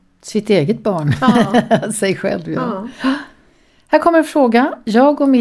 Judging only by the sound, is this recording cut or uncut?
uncut